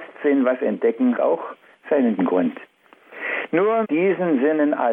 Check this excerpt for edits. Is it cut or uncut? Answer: cut